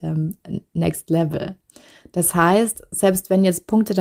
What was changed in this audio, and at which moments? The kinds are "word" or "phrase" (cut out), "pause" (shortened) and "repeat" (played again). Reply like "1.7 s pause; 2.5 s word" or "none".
none

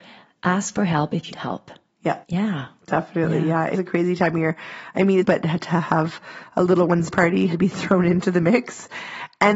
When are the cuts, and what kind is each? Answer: 1.3 s word; 2.2 s pause; 3.7 s word; 5.2 s phrase; 7.1 s word; 7.5 s word

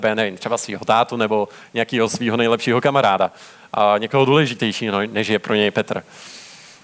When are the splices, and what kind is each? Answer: none

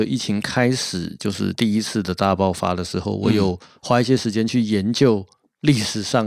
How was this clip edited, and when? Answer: none

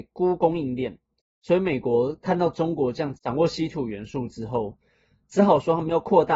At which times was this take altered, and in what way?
none

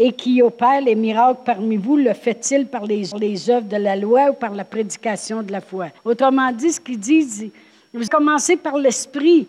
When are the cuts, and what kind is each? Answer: 3.1 s repeat; 6.0 s pause; 8.1 s word

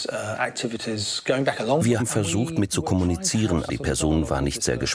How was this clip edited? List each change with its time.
2.0 s word; 2.7 s word; 3.7 s word

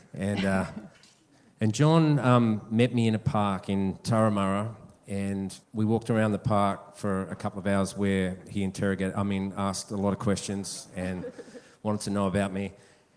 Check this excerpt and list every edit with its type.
0.9 s pause; 5.6 s pause

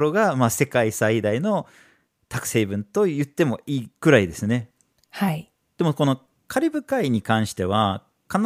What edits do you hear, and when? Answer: none

